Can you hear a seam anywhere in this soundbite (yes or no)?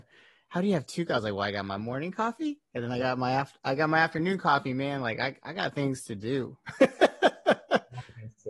no